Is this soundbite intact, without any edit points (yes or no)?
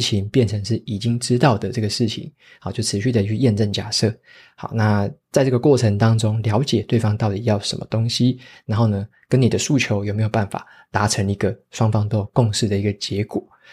yes